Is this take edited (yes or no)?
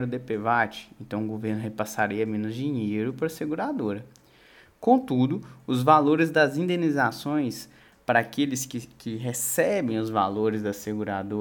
no